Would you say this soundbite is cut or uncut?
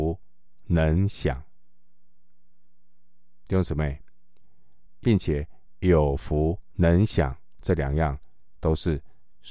cut